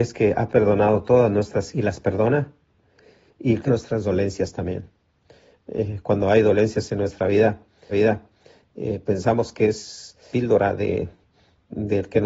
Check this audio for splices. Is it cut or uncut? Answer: cut